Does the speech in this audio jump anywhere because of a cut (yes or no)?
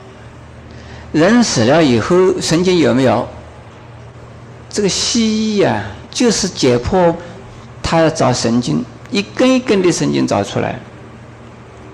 no